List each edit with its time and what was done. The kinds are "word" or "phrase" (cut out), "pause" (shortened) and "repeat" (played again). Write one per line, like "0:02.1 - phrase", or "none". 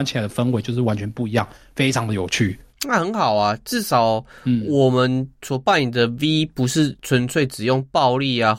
none